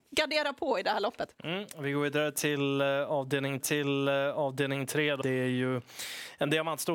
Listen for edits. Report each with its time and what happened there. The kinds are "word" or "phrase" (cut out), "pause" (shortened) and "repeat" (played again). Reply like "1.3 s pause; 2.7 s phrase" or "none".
1.3 s pause; 3.6 s repeat; 5.2 s word